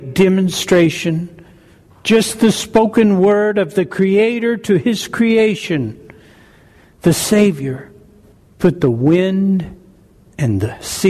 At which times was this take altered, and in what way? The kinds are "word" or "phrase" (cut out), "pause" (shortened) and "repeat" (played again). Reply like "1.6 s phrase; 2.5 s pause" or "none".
none